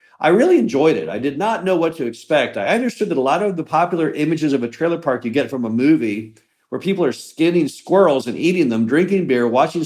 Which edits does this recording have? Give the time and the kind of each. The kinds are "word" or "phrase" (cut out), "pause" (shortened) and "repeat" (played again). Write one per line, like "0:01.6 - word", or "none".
none